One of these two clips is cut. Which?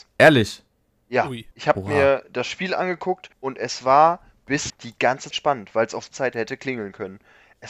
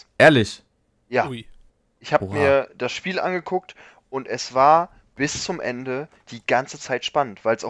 first; 5 cuts; at 1.5 s, 3.3 s, 4.7 s, 5.3 s, 6.1 s

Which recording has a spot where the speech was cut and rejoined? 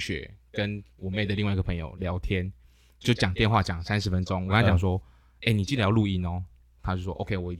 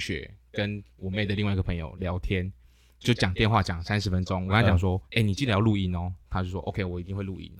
second; 2 cuts; at 5.1 s, 6.2 s

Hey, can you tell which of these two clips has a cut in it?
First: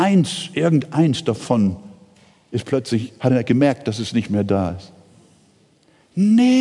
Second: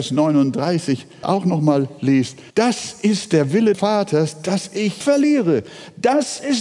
second; 4 cuts; at 1.2 s, 2.5 s, 3.7 s, 5.0 s

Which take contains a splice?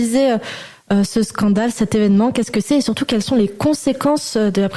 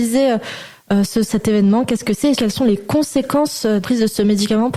second; 3 cuts; at 1.3 s, 2.3 s, 3.8 s

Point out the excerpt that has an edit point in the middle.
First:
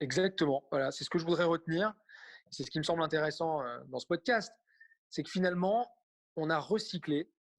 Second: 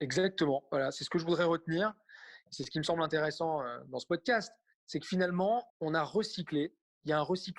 second; 2 cuts; at 4.7 s, 5.7 s

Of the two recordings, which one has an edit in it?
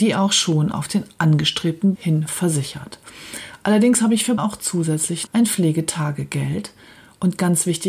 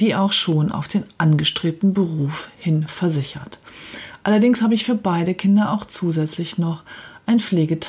first; 3 cuts; at 2.0 s, 4.4 s, 5.3 s

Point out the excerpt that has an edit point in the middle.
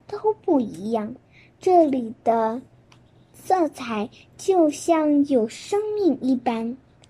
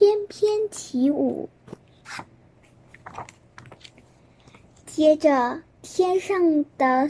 first; 1 cut; at 1.3 s

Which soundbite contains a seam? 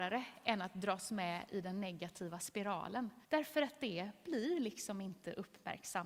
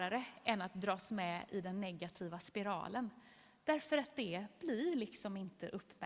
first; 1 cut; at 3.2 s

